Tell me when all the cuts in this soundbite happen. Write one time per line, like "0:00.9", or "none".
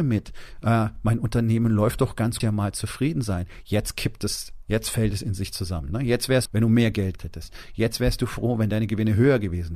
0:02.4
0:06.4
0:07.2